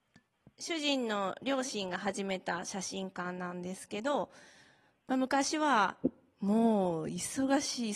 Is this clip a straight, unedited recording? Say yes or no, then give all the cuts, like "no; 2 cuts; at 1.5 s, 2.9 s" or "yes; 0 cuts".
yes; 0 cuts